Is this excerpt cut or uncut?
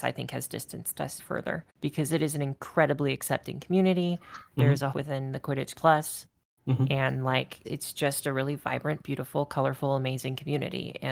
cut